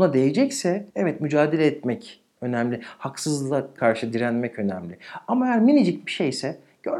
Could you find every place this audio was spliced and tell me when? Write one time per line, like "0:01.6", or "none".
0:00.9
0:03.8

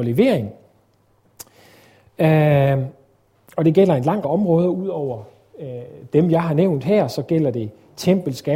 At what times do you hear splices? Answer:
0:04.2

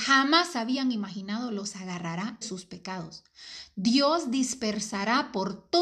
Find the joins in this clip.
0:02.4

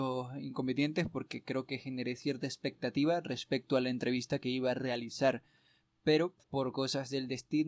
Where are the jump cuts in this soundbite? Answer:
0:06.4

